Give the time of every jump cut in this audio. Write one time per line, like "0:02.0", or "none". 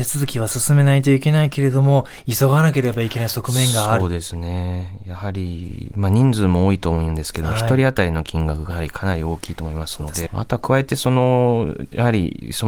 0:08.7
0:10.3